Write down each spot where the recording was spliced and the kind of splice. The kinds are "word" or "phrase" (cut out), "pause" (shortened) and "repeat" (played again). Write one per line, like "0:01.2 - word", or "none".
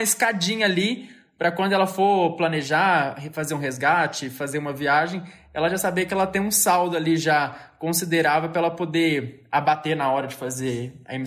none